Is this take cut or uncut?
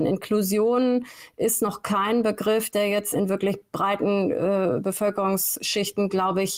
cut